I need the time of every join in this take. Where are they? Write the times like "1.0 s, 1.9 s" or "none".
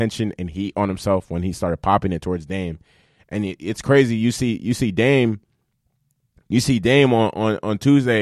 none